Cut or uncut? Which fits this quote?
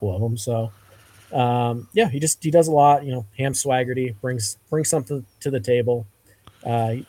uncut